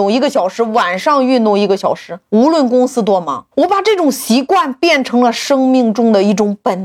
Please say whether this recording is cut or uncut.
cut